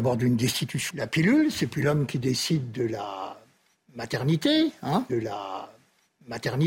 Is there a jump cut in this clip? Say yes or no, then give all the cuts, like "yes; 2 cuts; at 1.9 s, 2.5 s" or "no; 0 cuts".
yes; 2 cuts; at 0.9 s, 5.1 s